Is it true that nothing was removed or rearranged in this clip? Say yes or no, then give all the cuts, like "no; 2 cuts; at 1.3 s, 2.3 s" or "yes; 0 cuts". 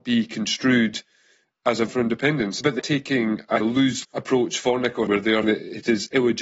no; 6 cuts; at 1.9 s, 2.8 s, 3.6 s, 4.0 s, 5.1 s, 5.4 s